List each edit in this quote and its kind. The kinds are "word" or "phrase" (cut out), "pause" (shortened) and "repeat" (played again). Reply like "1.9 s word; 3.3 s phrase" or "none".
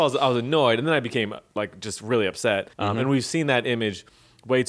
2.7 s pause